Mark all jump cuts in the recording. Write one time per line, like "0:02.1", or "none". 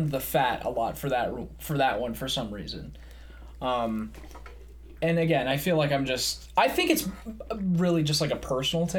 none